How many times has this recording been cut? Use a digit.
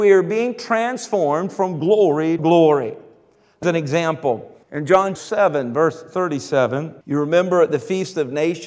5